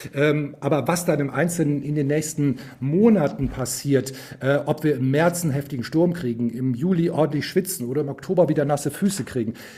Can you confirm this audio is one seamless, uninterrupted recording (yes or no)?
yes